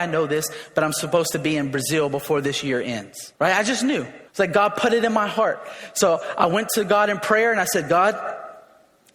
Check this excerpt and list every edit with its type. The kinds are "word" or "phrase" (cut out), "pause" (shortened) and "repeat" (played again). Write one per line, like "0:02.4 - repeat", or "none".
0:03.4 - pause
0:04.3 - pause